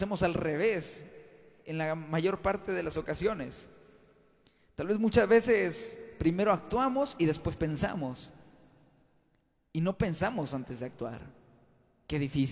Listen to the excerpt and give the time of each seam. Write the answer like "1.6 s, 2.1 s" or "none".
none